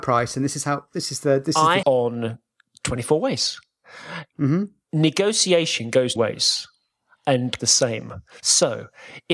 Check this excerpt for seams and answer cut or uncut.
cut